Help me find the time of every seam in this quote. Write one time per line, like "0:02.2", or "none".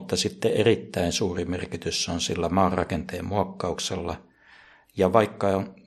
none